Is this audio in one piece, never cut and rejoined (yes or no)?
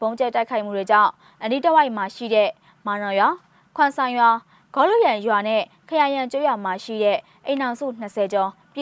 yes